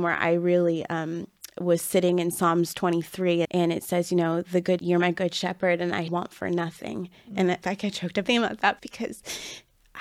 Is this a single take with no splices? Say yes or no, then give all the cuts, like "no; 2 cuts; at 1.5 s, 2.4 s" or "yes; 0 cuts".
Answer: no; 6 cuts; at 3.4 s, 4.8 s, 6.1 s, 7.6 s, 8.2 s, 8.8 s